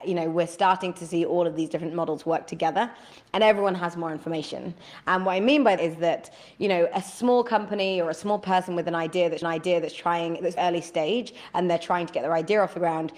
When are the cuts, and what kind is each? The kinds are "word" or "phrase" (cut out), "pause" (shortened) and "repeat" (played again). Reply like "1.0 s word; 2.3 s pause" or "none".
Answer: 5.8 s word; 6.9 s word; 9.4 s repeat; 10.6 s word